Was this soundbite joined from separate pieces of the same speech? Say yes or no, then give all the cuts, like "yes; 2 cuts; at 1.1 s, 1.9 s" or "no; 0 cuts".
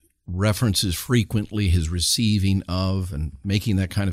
no; 0 cuts